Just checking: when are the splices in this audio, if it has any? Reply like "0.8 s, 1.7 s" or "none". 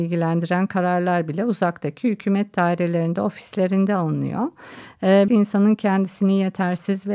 5.3 s

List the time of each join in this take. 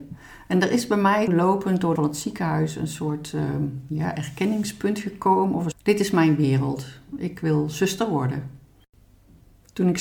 1.3 s, 2.0 s, 5.7 s

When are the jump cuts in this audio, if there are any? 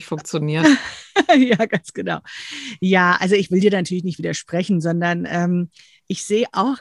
none

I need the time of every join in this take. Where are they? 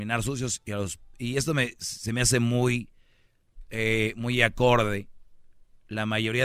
none

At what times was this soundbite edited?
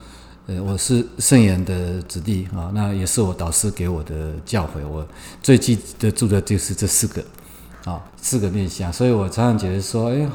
8.1 s

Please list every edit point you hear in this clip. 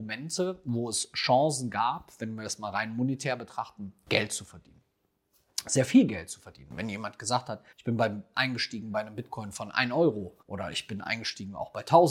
7.7 s, 10.4 s

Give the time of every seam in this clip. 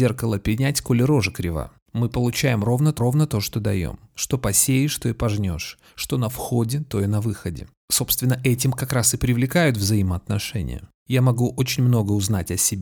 3.0 s

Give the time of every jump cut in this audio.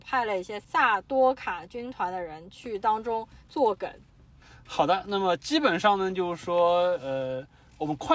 none

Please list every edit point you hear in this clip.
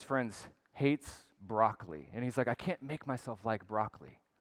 none

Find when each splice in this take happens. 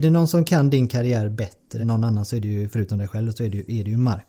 1.8 s

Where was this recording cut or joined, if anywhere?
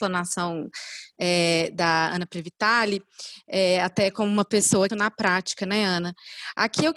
4.9 s

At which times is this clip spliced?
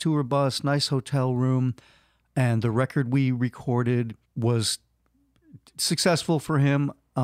4.2 s

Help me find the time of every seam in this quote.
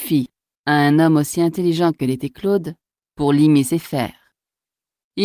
none

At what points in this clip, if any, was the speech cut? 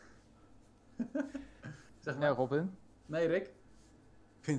none

